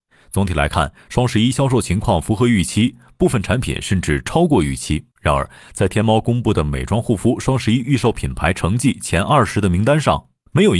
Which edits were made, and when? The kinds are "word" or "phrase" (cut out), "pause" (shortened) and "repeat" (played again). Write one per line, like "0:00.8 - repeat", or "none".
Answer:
0:05.1 - pause